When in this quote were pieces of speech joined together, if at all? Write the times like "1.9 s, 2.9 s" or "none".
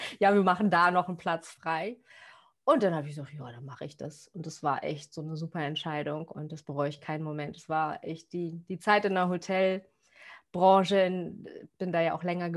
none